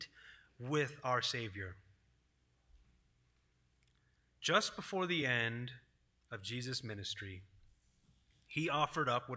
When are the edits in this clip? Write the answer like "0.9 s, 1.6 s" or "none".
none